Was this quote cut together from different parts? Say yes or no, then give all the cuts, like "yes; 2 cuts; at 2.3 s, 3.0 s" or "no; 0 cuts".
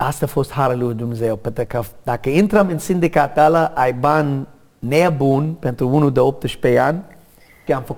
no; 0 cuts